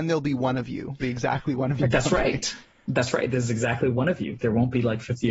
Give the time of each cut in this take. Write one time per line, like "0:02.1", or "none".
0:01.0
0:01.8